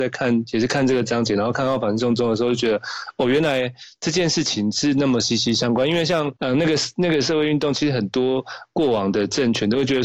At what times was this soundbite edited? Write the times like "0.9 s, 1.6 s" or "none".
6.4 s